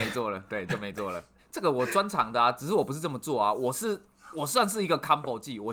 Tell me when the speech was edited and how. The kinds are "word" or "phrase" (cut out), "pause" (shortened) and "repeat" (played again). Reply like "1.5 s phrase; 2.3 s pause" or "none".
1.4 s pause